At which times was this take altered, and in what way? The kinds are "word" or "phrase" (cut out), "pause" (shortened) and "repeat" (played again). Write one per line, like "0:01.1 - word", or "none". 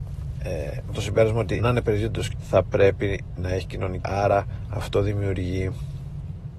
0:01.0 - word
0:01.6 - word
0:02.3 - word
0:04.0 - word